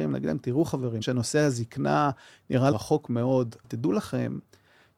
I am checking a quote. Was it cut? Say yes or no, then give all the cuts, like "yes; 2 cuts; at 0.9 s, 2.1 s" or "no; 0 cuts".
yes; 3 cuts; at 1.0 s, 2.7 s, 3.6 s